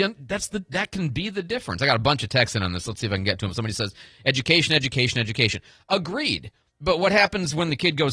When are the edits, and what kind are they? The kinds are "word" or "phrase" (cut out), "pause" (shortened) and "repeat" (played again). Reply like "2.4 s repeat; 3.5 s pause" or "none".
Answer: 6.7 s pause